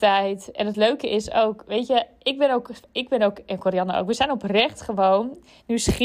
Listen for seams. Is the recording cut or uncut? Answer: uncut